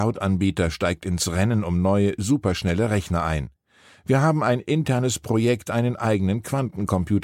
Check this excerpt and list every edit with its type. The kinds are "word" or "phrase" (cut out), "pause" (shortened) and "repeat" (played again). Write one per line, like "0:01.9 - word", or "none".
none